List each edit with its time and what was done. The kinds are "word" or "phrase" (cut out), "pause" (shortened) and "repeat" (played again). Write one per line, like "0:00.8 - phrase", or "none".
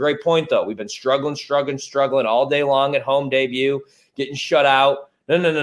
none